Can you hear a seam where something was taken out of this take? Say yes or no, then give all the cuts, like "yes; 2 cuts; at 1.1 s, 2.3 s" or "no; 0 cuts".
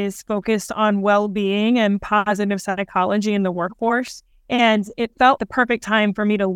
yes; 1 cut; at 5.4 s